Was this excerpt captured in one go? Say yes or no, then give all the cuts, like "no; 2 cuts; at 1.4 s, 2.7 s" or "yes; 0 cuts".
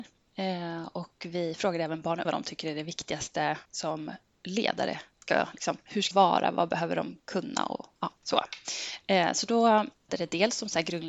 no; 5 cuts; at 2.2 s, 3.7 s, 6.1 s, 7.2 s, 10.1 s